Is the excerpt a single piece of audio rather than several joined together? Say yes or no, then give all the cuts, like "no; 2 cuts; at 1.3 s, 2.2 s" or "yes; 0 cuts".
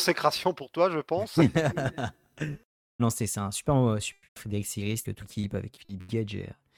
no; 4 cuts; at 3.0 s, 4.3 s, 5.0 s, 5.8 s